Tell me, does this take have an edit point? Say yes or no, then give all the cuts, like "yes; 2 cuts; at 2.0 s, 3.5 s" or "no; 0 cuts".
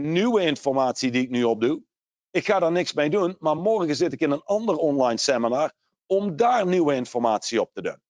no; 0 cuts